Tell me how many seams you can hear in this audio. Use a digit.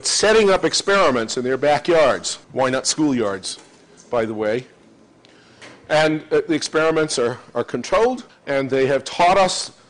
2